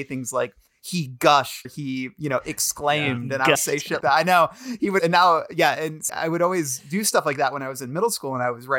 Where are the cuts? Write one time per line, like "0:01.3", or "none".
0:01.6
0:03.5
0:04.0
0:05.0
0:06.1